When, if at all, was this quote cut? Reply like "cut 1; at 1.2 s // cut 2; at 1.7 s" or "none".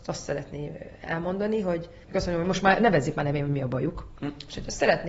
cut 1; at 2.0 s